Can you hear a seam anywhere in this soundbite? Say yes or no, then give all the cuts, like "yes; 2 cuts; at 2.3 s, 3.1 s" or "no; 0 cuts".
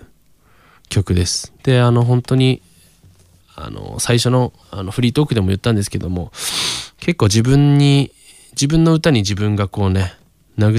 yes; 2 cuts; at 1.6 s, 4.6 s